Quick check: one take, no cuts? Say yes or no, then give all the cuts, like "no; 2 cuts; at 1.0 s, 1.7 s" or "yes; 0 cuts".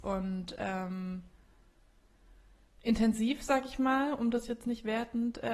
yes; 0 cuts